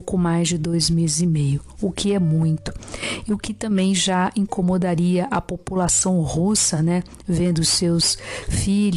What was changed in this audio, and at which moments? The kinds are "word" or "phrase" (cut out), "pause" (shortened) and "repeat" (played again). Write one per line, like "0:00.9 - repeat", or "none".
none